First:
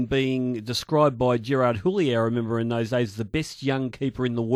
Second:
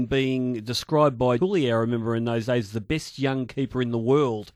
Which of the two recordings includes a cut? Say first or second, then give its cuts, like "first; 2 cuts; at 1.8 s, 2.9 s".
second; 1 cut; at 1.4 s